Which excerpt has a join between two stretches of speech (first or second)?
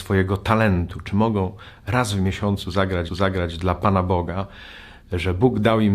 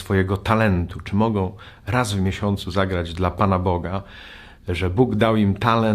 first